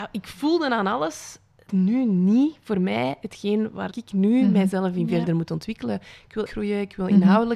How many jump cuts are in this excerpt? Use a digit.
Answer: 3